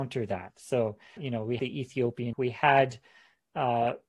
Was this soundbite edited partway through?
yes; 3 cuts; at 1.2 s, 1.6 s, 2.3 s

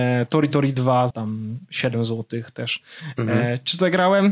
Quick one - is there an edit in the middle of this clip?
yes; 1 cut; at 1.1 s

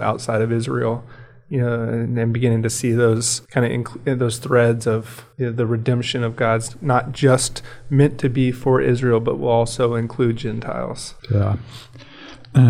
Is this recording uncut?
no; 3 cuts; at 3.4 s, 5.3 s, 11.2 s

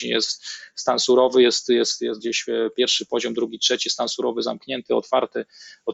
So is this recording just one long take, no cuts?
yes; 0 cuts

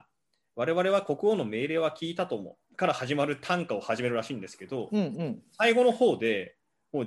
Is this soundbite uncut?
no; 1 cut; at 2.6 s

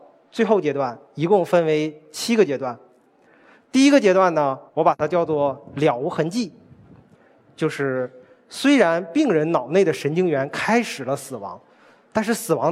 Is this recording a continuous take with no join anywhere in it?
no; 1 cut; at 4.7 s

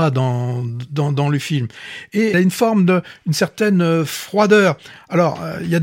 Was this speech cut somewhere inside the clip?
yes; 1 cut; at 2.3 s

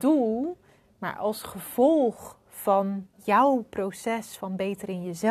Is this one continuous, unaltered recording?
no; 1 cut; at 3.1 s

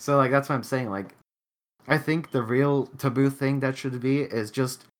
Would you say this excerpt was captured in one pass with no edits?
yes; 0 cuts

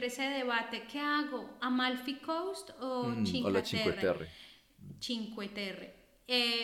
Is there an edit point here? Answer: no; 0 cuts

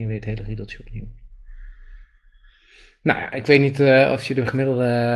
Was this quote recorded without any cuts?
yes; 0 cuts

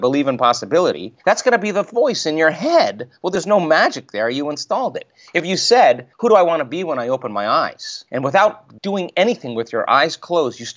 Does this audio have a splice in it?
yes; 4 cuts; at 1.2 s, 6.1 s, 8.1 s, 8.8 s

